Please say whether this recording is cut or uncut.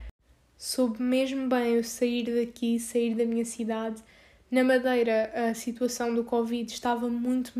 uncut